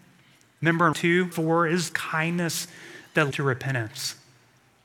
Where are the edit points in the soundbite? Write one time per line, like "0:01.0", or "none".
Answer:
0:00.9
0:01.3
0:01.9
0:03.3